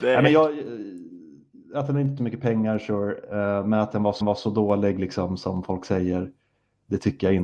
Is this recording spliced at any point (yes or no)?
yes